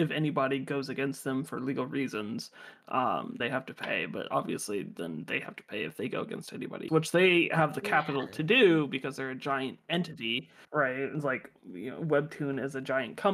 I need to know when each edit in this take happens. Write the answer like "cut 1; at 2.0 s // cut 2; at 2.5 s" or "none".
cut 1; at 3.4 s // cut 2; at 6.9 s // cut 3; at 10.6 s